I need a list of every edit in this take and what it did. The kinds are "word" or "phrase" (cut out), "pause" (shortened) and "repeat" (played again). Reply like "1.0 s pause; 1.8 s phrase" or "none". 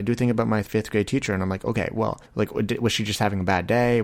2.2 s pause